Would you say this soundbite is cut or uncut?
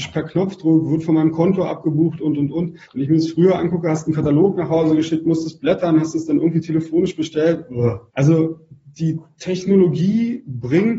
cut